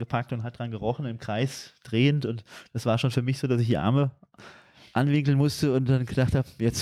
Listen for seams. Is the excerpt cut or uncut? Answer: uncut